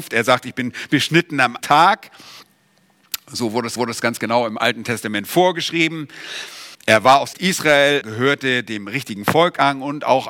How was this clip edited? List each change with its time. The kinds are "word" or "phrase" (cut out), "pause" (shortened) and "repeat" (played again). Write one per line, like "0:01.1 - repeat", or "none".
0:01.6 - word
0:03.8 - repeat
0:06.7 - pause
0:07.3 - phrase
0:08.0 - word

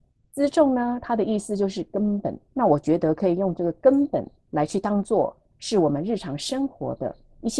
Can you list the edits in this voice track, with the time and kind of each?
0:02.5 - pause
0:04.4 - pause

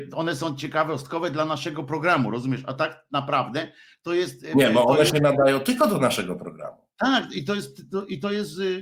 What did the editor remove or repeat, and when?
none

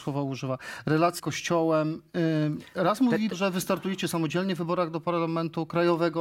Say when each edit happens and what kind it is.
0:01.2 - word
0:03.3 - word

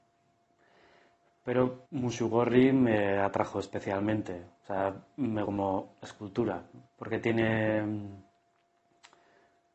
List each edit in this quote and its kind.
0:01.9 - pause
0:05.4 - phrase
0:06.9 - pause

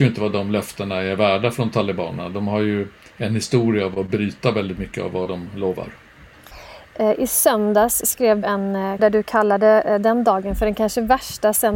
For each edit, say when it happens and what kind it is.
0:08.4 - word
0:09.0 - word

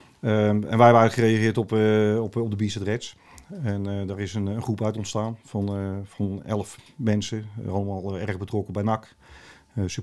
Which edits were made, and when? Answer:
none

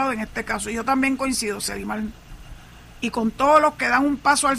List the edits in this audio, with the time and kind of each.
none

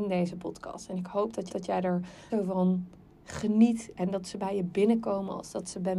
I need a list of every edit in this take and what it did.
0:01.5 - repeat
0:02.3 - word

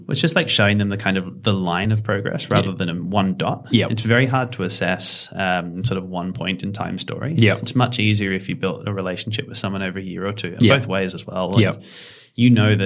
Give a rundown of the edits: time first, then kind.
none

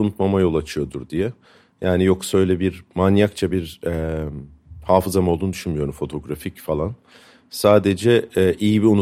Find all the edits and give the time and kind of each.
none

